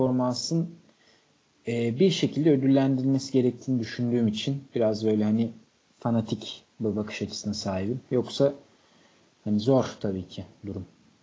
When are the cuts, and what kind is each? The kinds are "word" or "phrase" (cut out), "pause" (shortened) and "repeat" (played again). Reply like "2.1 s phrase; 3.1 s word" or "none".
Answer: none

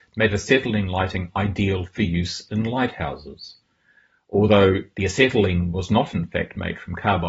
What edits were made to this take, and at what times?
none

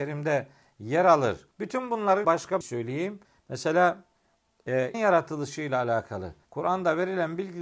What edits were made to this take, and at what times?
1.5 s pause; 2.2 s word; 2.6 s phrase; 3.2 s pause; 4.9 s word; 6.4 s pause

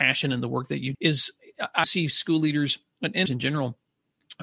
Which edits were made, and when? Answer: 0.9 s word; 1.8 s word; 3.3 s word

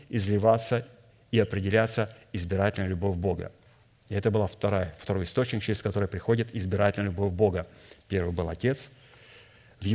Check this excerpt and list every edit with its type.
none

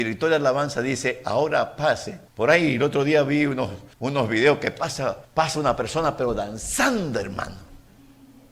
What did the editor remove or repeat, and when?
2.3 s pause; 3.9 s pause; 5.2 s pause

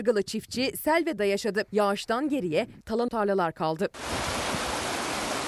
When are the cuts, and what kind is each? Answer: 1.2 s phrase; 1.7 s pause; 3.1 s word

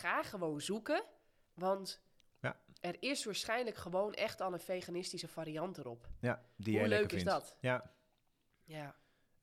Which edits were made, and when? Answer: none

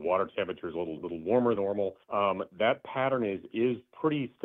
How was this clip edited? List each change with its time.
1.0 s phrase; 1.6 s word; 2.0 s pause

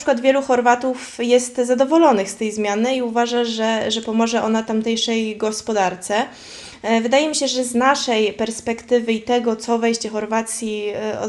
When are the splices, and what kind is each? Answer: none

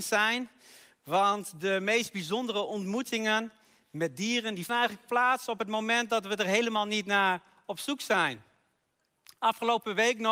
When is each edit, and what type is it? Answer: 4.7 s word

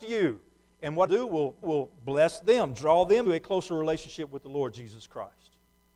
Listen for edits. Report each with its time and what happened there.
1.1 s word; 1.6 s repeat; 3.3 s word

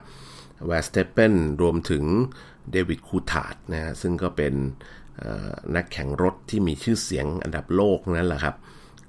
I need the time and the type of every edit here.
6.4 s pause

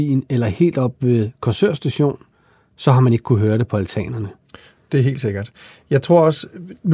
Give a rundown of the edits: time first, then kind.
none

